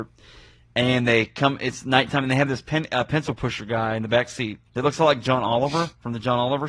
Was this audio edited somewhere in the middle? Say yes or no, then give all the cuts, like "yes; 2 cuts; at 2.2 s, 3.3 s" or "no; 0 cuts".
yes; 1 cut; at 4.7 s